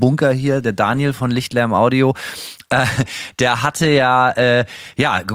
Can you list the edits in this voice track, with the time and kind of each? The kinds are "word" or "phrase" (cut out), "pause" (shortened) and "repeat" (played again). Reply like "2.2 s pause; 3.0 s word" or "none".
none